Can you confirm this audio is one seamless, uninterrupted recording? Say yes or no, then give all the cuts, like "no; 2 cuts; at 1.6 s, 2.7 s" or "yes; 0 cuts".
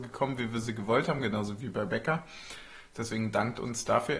yes; 0 cuts